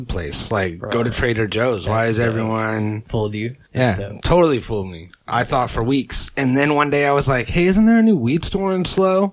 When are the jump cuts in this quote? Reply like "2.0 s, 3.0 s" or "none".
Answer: 3.6 s

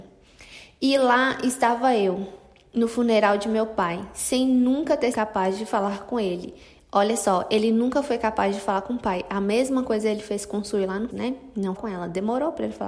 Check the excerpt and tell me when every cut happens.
5.1 s, 11.1 s, 11.8 s

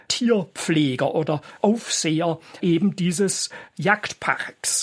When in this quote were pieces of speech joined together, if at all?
none

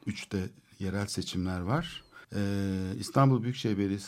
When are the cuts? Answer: 2.2 s

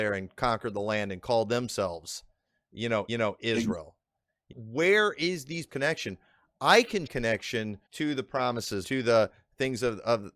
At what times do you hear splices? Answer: 3.1 s, 4.5 s, 5.7 s, 7.1 s, 7.9 s, 8.8 s

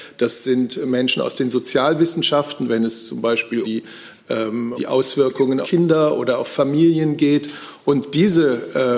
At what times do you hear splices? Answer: 3.6 s, 4.8 s, 5.6 s

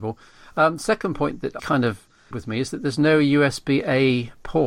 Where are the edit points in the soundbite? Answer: 1.6 s, 2.3 s

